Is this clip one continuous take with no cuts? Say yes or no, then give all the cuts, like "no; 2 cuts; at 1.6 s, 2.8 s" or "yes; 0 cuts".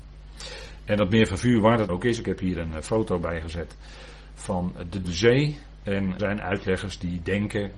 no; 3 cuts; at 1.9 s, 5.0 s, 6.2 s